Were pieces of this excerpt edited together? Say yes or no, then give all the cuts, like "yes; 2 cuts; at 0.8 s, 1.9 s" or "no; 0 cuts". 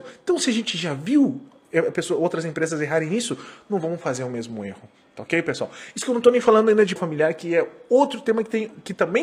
yes; 1 cut; at 7.0 s